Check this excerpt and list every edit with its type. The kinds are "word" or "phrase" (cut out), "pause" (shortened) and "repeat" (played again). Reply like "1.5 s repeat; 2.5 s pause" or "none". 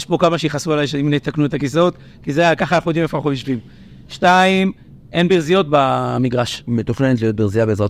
none